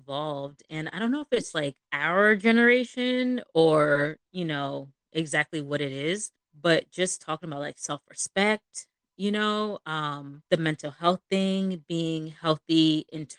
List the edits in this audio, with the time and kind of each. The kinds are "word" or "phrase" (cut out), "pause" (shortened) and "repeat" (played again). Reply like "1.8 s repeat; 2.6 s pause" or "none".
1.5 s word; 1.8 s pause; 6.4 s pause; 10.5 s pause